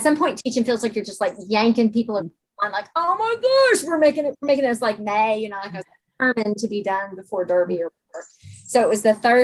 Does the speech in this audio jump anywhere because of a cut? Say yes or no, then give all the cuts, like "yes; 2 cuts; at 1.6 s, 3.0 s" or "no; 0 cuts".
no; 0 cuts